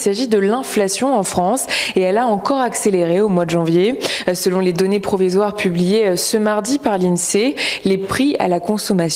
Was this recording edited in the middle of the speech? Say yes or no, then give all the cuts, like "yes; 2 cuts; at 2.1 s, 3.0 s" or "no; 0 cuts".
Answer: no; 0 cuts